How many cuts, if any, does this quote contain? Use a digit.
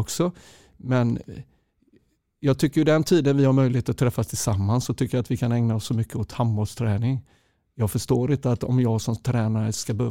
0